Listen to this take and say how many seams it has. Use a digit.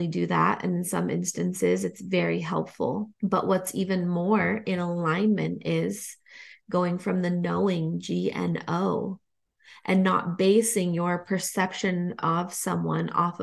1